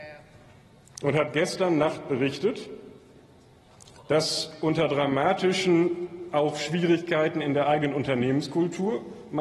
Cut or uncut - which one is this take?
uncut